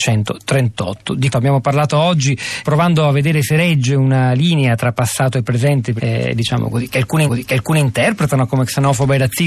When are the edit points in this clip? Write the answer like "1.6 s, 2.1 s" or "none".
1.3 s, 2.6 s, 6.0 s, 7.3 s